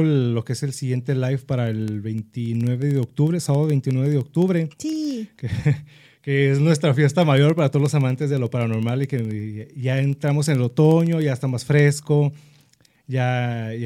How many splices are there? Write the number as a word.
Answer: one